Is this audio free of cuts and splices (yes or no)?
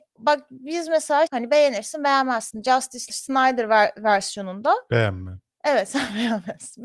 no